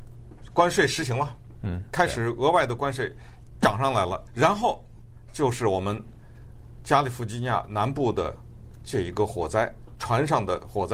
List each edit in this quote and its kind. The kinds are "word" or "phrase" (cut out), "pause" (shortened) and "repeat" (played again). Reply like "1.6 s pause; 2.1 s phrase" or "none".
4.3 s word